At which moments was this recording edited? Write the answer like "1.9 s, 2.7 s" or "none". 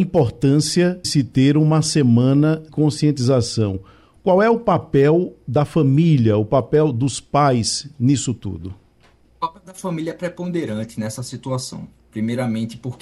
1.0 s, 2.7 s